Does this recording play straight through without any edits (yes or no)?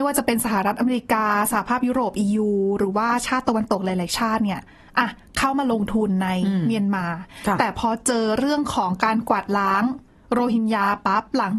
yes